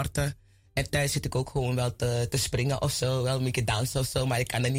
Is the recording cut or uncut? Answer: uncut